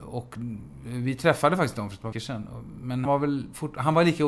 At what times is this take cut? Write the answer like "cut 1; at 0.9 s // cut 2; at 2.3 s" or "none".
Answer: cut 1; at 2.1 s // cut 2; at 3.1 s